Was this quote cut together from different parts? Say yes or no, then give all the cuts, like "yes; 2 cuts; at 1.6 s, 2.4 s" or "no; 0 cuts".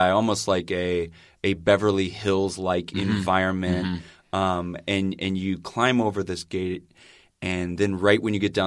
no; 0 cuts